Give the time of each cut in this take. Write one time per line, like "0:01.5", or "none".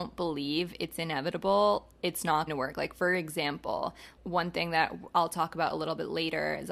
0:02.5
0:04.2